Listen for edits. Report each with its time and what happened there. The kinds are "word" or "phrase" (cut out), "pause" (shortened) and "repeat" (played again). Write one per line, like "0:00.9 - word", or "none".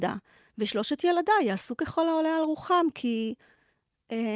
none